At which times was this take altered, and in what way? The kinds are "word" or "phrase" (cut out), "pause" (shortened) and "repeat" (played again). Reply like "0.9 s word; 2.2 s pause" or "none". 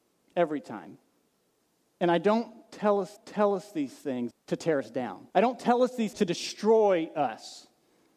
1.6 s pause; 3.2 s repeat; 4.3 s phrase; 5.3 s pause; 6.1 s word